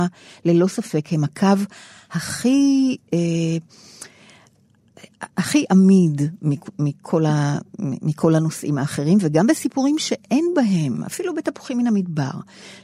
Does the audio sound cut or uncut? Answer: uncut